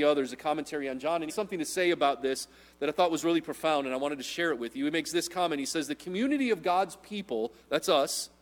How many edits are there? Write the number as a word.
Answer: one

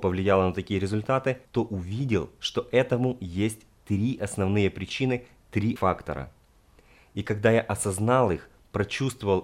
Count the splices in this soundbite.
two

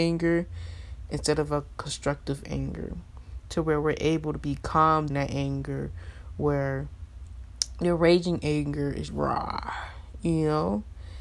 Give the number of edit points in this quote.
two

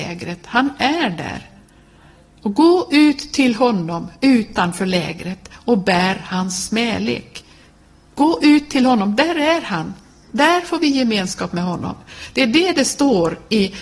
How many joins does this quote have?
zero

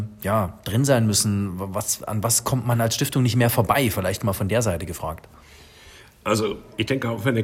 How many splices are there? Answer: zero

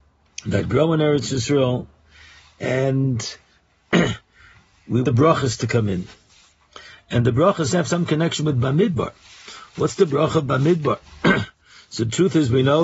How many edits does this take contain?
two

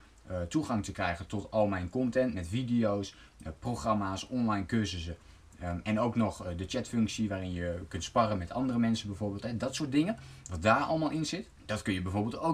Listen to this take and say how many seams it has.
one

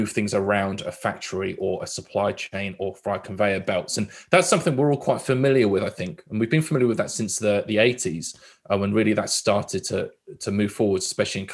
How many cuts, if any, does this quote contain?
zero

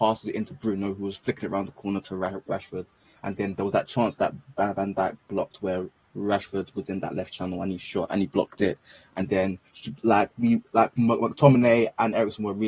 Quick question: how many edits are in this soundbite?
one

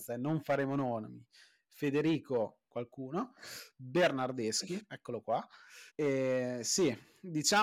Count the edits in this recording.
two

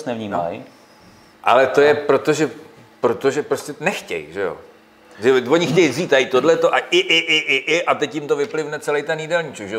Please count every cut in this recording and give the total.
zero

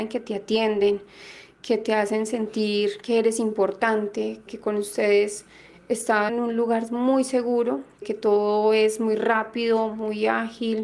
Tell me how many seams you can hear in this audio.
three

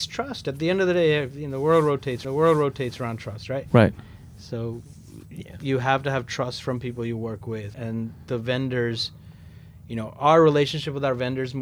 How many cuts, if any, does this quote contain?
two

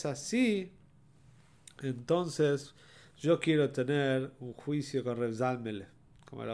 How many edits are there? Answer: zero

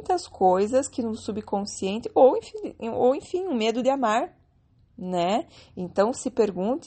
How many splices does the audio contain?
zero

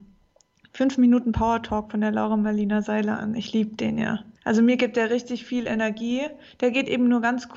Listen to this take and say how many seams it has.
one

